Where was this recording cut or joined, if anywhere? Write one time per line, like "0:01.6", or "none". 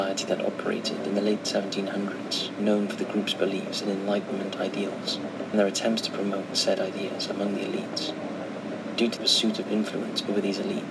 0:02.6
0:05.5
0:09.2